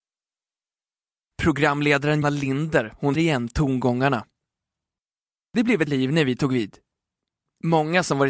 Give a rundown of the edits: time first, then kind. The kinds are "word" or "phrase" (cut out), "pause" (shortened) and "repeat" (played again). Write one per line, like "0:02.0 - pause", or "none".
0:02.2 - word
0:03.1 - word
0:05.9 - word